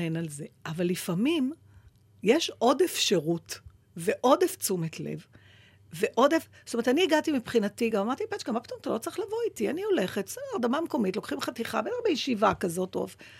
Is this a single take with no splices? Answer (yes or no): yes